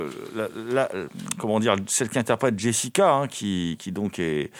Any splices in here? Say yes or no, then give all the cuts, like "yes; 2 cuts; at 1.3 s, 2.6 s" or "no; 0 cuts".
no; 0 cuts